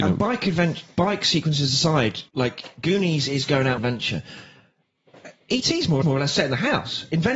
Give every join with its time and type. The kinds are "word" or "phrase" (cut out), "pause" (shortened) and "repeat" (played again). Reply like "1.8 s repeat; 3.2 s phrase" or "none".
2.3 s pause; 3.8 s phrase; 6.0 s repeat